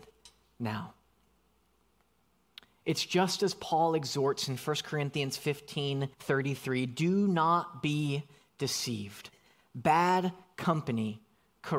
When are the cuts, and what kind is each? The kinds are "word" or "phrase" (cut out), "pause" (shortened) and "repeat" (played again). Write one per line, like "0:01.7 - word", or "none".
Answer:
0:06.1 - pause